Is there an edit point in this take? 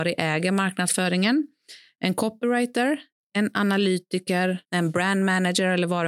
yes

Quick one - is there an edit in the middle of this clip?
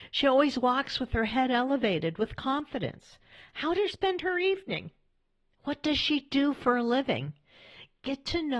yes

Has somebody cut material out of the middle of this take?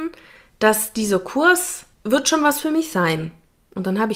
yes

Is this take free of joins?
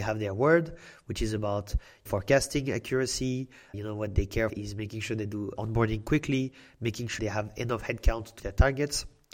no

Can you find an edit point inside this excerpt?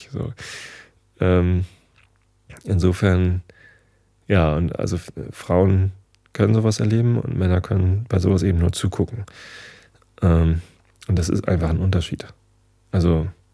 no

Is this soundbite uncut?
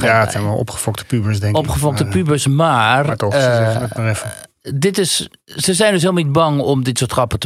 yes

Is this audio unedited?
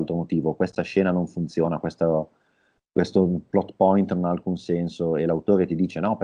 yes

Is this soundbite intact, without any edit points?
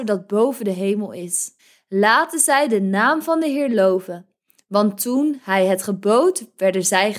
no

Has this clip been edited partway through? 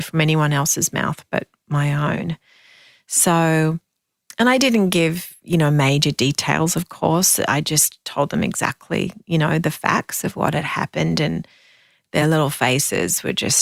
no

